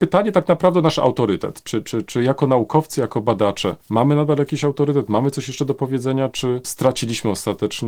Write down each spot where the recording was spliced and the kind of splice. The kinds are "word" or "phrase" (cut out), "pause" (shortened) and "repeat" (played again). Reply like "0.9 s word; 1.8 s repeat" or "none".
3.8 s pause

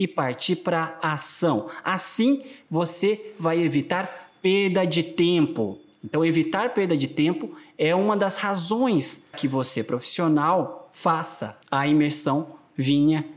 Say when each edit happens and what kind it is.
9.3 s word; 11.6 s pause

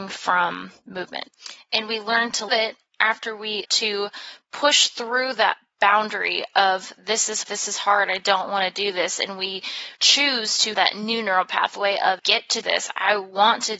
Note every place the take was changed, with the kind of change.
2.5 s word; 3.6 s word; 7.4 s word; 9.9 s pause; 10.7 s word; 12.2 s word; 12.6 s word

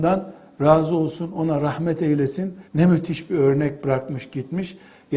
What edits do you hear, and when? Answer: 2.7 s pause

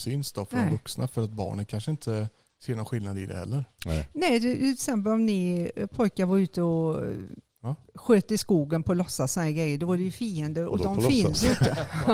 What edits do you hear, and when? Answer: none

